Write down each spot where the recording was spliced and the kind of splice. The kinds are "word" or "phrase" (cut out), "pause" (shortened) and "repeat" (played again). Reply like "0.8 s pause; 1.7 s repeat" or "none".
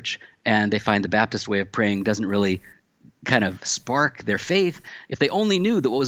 2.8 s pause